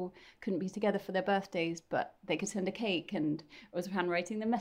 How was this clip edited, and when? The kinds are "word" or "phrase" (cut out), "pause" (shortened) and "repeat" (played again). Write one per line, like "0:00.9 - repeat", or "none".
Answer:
none